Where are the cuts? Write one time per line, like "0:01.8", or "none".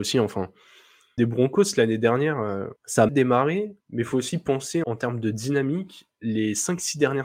0:01.2
0:02.8
0:03.1
0:03.8
0:04.8

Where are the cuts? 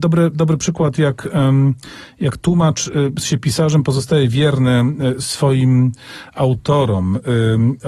0:03.2

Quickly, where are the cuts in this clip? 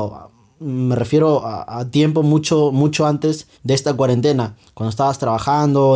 0:03.5

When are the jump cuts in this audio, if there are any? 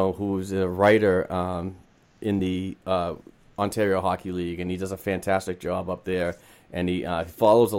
none

